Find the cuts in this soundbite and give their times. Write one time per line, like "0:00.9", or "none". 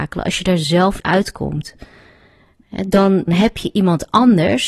0:01.0
0:03.3